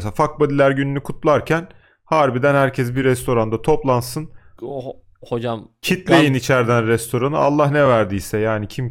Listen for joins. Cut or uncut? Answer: uncut